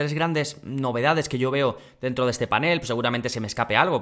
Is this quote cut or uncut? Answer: uncut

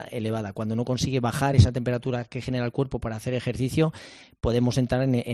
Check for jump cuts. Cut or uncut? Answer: uncut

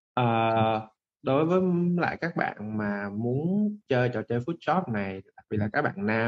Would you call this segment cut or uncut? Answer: uncut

